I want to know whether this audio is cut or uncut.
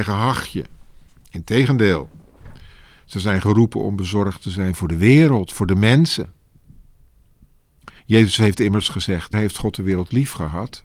cut